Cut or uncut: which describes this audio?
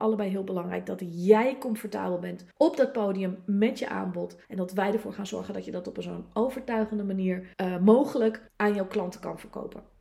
cut